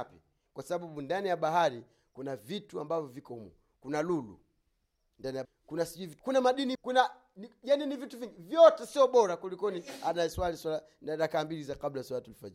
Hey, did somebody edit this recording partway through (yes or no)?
yes